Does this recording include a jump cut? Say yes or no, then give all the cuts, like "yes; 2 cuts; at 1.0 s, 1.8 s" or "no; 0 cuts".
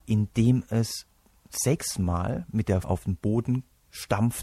yes; 2 cuts; at 1.4 s, 2.8 s